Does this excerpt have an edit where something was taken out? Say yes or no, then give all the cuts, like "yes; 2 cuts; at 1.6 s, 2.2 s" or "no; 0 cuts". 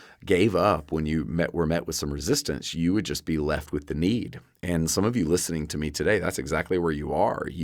no; 0 cuts